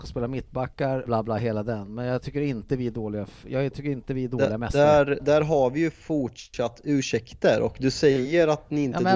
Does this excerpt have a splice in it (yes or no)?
yes